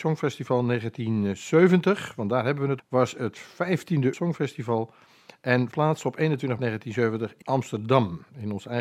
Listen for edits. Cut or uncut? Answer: cut